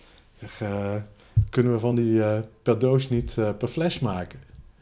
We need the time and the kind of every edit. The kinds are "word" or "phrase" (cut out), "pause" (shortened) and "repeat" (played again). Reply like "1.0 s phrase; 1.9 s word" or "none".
none